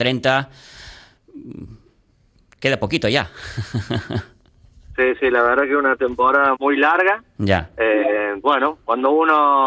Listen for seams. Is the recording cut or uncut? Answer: cut